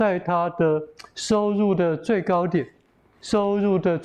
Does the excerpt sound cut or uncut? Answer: uncut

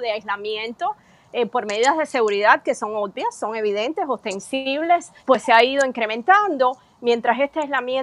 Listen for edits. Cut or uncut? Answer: cut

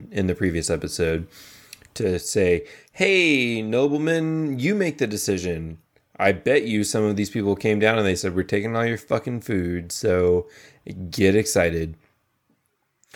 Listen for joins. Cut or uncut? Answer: uncut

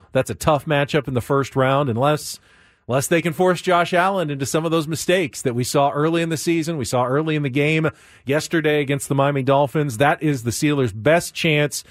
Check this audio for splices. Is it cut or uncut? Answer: uncut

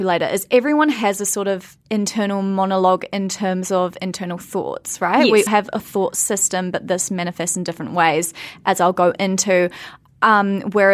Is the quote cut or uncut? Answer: cut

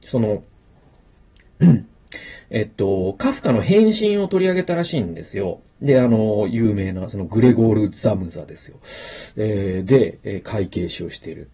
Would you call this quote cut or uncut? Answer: uncut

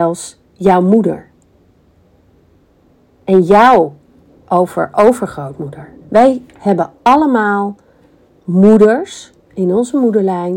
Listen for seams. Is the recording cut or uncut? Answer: cut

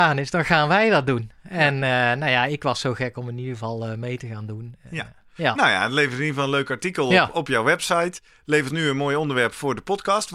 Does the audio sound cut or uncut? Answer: cut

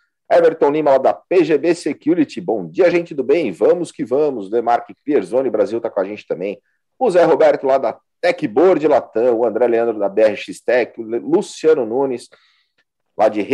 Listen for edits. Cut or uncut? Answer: uncut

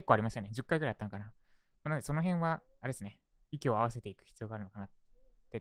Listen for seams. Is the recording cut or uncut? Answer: uncut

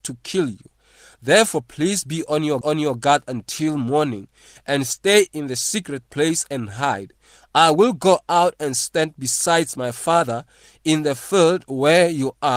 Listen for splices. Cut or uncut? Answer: cut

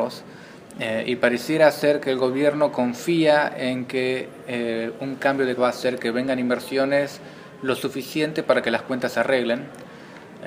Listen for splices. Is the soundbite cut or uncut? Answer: cut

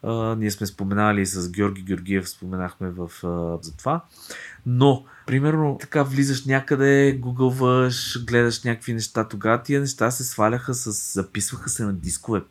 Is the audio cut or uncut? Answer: cut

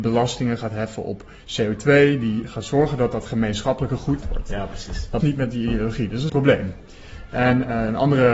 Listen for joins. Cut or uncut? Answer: cut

